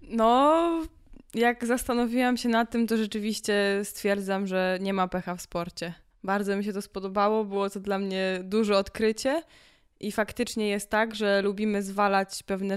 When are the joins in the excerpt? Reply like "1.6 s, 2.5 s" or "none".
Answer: 6.1 s